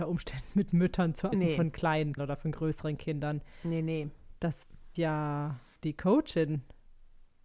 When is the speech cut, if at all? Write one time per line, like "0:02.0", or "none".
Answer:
0:01.3
0:02.2
0:05.0
0:05.8